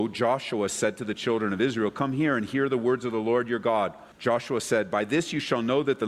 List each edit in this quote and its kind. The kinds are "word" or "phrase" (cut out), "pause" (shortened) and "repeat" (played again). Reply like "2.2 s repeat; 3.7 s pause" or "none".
none